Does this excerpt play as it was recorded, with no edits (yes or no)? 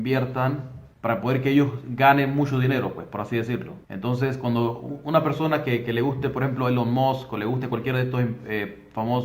no